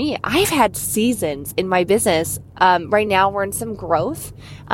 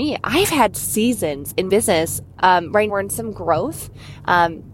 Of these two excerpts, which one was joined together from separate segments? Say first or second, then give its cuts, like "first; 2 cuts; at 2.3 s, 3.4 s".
second; 2 cuts; at 1.7 s, 2.9 s